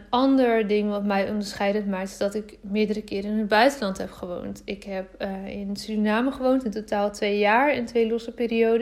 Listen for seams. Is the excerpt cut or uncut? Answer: uncut